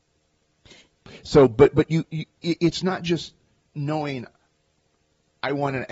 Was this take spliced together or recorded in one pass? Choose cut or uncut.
uncut